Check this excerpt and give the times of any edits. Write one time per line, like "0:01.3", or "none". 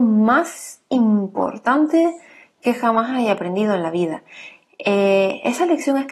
none

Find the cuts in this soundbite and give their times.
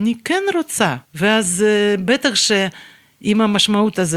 0:01.1

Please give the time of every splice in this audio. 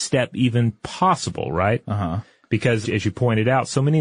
0:02.8

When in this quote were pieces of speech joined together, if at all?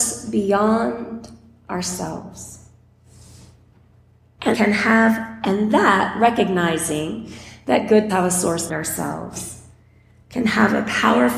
0:04.5
0:08.1
0:08.7

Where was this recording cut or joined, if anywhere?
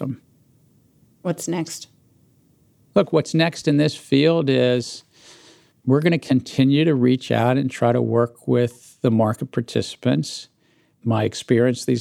none

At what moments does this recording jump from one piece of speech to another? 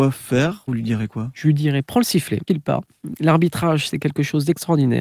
0:02.5

